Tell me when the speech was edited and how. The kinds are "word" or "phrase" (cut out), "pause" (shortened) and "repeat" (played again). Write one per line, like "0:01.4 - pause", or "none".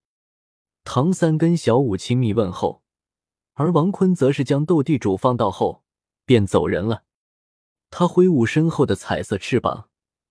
none